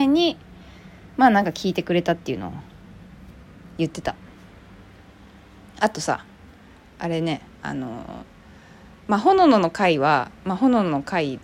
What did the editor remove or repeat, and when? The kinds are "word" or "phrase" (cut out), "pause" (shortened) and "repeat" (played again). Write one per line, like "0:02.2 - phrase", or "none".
none